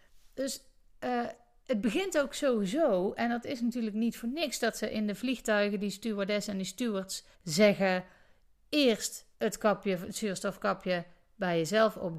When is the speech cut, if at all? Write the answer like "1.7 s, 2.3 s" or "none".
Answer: 7.3 s, 9.3 s